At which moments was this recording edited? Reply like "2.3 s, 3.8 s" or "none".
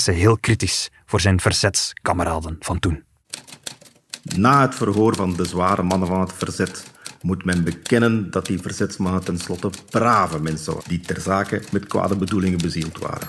10.8 s, 11.7 s